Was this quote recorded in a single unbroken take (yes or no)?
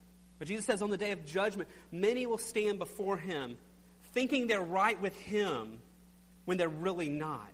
yes